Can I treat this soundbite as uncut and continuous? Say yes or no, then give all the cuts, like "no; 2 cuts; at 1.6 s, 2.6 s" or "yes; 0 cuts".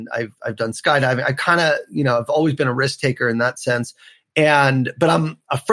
yes; 0 cuts